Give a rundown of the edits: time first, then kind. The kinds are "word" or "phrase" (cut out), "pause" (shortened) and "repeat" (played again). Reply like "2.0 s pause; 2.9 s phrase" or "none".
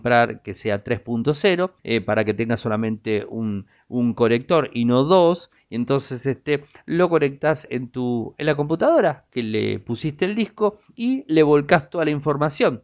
1.8 s pause